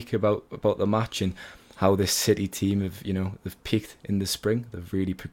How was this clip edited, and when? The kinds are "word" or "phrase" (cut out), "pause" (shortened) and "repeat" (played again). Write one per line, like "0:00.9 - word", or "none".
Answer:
none